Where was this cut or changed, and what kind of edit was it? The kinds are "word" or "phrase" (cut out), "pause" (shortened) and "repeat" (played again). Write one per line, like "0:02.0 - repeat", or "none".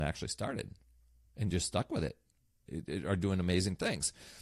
none